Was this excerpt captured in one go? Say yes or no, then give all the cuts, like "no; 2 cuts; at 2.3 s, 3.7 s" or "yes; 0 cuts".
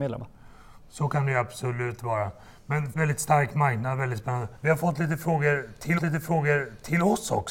no; 3 cuts; at 2.9 s, 4.6 s, 6.0 s